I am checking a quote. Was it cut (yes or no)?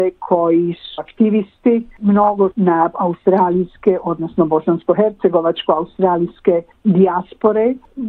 yes